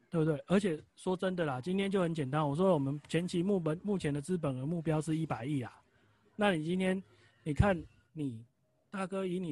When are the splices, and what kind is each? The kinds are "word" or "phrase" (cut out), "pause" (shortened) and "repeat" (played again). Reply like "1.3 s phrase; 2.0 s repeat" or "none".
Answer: none